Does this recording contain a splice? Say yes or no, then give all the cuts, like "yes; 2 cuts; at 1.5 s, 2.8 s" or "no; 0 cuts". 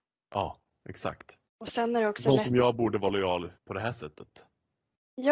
yes; 2 cuts; at 1.5 s, 3.6 s